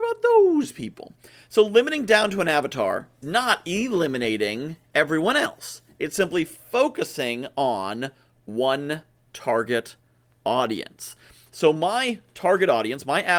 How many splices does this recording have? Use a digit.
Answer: 1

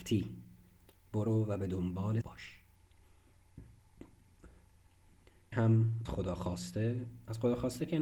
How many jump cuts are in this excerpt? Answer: 3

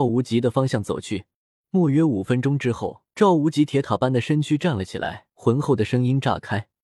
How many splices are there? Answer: 3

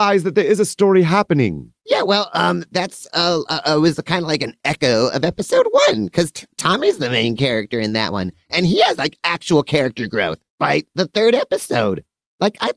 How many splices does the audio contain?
2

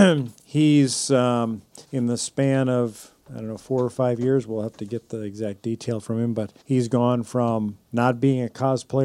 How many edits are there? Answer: 4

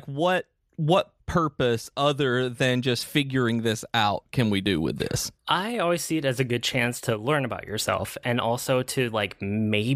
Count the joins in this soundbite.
1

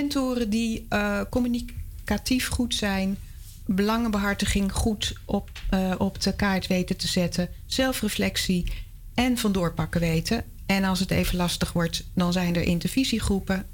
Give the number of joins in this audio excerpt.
0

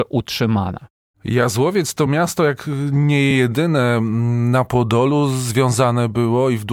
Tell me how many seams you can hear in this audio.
0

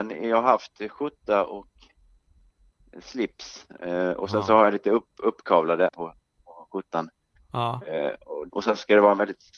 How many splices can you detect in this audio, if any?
2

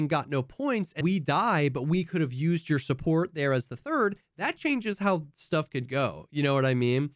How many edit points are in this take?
1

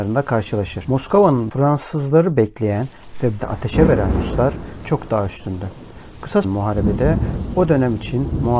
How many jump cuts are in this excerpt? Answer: 4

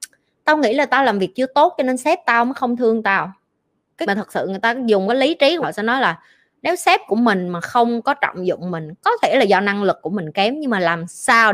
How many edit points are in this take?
2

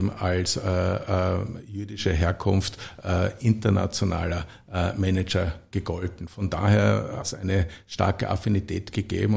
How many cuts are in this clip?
1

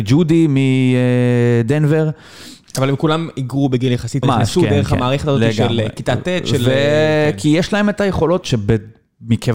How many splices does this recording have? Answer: 2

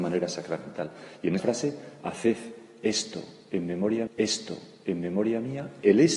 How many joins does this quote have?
2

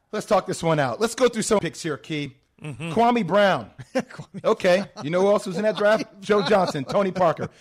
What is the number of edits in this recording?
1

